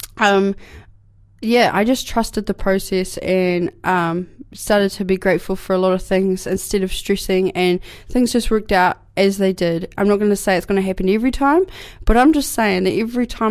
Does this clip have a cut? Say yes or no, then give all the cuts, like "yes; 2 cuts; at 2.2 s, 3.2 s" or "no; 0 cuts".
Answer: no; 0 cuts